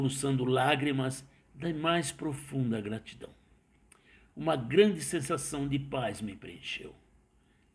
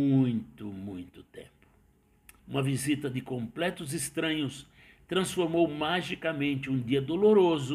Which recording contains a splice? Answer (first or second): second